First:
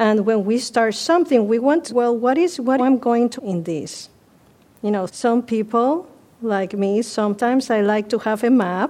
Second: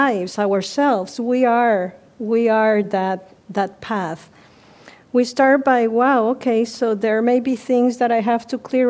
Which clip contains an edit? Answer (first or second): first